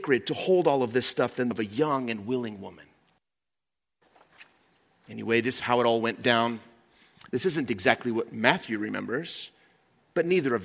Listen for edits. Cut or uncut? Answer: cut